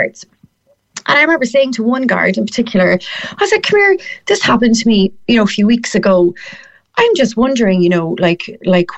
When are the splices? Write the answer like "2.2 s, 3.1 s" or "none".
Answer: none